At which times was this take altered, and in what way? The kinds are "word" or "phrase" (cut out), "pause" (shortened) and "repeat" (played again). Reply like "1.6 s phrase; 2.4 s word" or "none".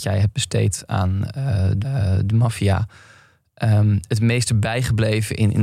1.8 s repeat

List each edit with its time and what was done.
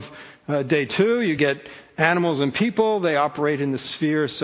none

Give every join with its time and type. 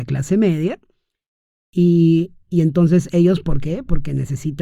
none

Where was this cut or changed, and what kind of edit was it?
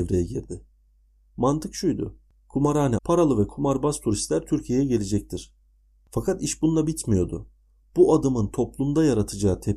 3.0 s word

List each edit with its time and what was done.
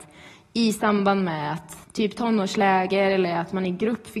1.8 s pause

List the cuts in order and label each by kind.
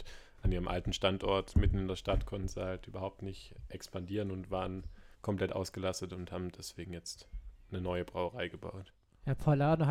5.1 s pause

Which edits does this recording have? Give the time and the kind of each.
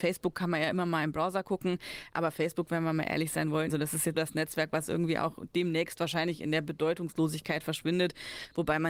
3.7 s word; 4.1 s word

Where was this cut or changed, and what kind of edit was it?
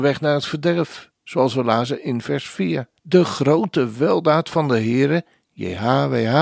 3.0 s pause

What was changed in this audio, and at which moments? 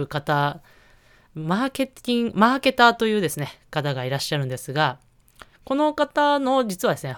5.5 s pause

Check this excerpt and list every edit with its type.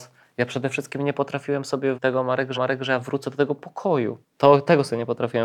1.9 s word; 2.5 s repeat; 4.2 s pause

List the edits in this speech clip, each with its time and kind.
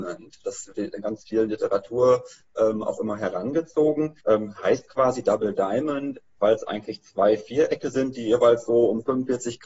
4.2 s pause

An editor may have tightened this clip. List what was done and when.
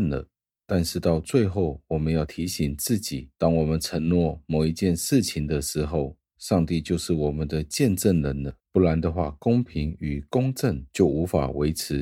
3.3 s pause; 8.6 s pause

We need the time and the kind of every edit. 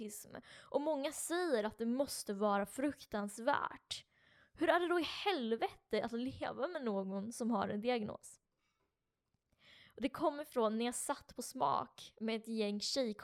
none

